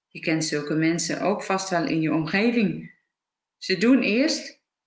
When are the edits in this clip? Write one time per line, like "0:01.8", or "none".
none